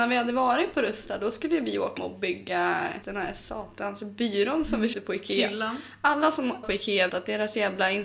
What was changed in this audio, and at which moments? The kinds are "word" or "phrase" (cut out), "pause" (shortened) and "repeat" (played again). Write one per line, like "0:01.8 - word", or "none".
0:02.0 - word
0:03.0 - word
0:04.9 - word
0:06.6 - word
0:07.1 - word